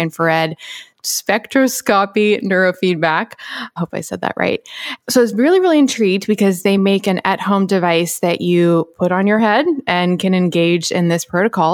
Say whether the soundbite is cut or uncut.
uncut